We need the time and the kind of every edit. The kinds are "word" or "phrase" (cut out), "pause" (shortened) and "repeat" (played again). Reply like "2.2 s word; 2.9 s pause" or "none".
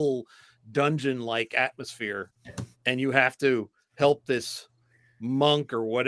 2.7 s pause